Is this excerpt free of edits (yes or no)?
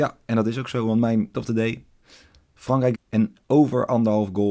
no